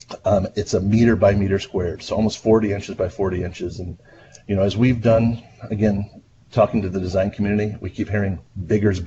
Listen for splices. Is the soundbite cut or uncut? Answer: uncut